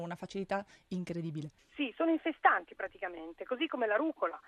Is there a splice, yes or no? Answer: no